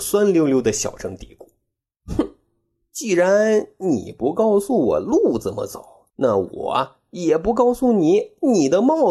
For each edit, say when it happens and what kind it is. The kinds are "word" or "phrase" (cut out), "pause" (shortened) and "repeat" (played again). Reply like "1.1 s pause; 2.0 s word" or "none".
6.1 s pause